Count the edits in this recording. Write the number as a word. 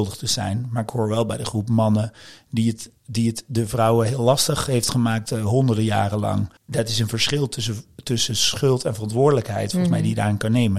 one